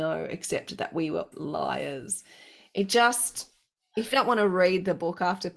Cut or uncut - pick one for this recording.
cut